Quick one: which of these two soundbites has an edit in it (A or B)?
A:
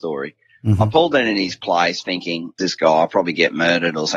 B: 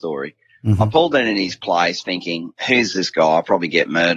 A